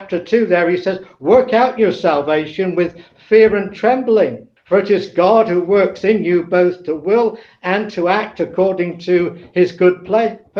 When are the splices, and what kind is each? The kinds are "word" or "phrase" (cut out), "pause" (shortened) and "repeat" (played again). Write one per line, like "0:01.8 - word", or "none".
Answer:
0:04.6 - pause